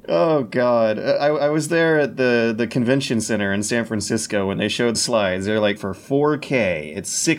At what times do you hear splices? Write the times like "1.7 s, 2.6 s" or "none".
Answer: 4.9 s, 5.8 s